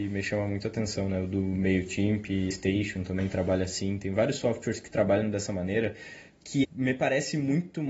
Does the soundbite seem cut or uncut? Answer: cut